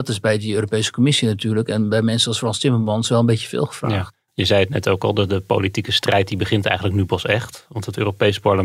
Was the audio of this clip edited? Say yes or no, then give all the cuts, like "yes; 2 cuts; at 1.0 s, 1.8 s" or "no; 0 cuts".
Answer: no; 0 cuts